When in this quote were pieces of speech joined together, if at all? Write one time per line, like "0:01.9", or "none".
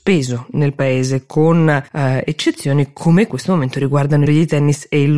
0:01.9
0:03.3
0:04.3